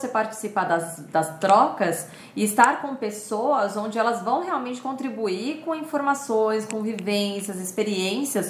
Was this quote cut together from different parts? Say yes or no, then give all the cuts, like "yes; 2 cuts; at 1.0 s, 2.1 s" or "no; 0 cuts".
no; 0 cuts